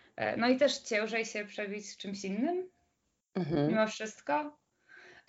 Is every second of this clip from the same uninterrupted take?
yes; 0 cuts

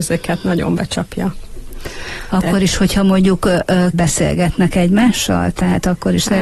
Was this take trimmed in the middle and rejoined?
yes; 1 cut; at 3.9 s

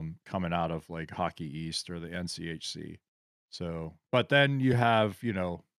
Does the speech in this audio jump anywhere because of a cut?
no; 0 cuts

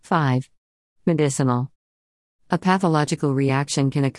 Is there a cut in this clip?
no; 0 cuts

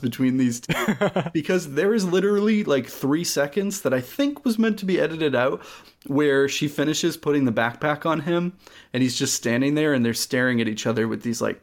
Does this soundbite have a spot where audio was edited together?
no; 0 cuts

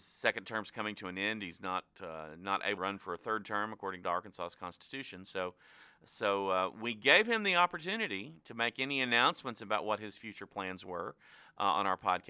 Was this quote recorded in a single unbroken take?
no; 1 cut; at 2.8 s

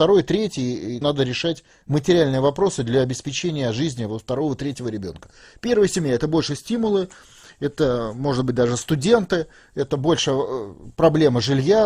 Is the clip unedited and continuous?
no; 1 cut; at 1.0 s

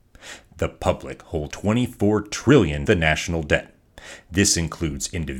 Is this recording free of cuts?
no; 2 cuts; at 1.5 s, 2.9 s

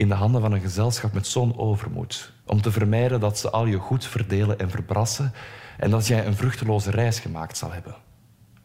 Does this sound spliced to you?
yes; 1 cut; at 2.4 s

